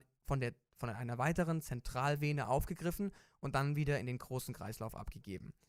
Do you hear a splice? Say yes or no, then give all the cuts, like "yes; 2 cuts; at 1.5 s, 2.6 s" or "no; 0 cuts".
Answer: no; 0 cuts